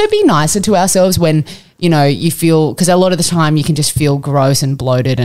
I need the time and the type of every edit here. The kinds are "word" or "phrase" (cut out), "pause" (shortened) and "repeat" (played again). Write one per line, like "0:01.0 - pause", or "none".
none